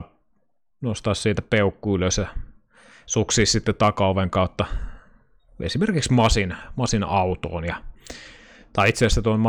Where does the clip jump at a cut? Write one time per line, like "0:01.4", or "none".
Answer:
none